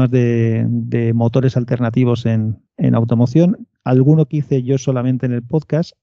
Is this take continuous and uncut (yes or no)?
no